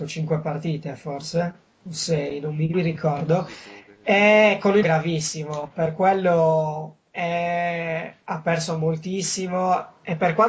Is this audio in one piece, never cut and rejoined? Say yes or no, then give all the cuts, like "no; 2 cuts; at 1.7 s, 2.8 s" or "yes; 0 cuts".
no; 3 cuts; at 2.7 s, 4.8 s, 7.0 s